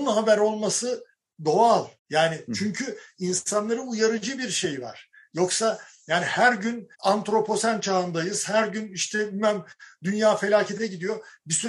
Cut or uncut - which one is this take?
cut